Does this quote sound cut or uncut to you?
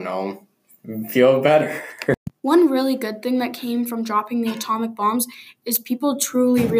cut